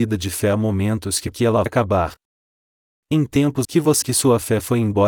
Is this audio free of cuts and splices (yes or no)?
no